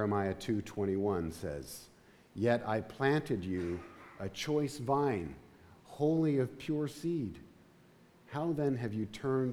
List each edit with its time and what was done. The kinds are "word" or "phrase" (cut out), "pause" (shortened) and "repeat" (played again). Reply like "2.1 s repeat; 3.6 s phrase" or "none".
none